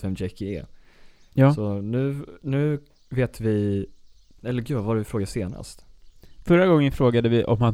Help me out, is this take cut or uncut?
uncut